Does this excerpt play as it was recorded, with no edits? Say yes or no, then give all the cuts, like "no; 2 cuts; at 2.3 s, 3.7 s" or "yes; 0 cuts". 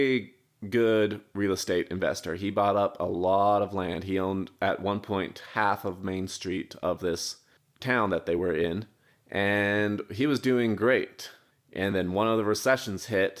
yes; 0 cuts